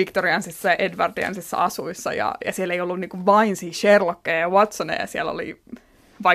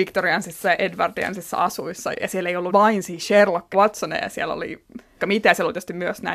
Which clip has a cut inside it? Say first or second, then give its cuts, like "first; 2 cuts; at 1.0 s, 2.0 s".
second; 4 cuts; at 2.1 s, 2.7 s, 3.7 s, 5.2 s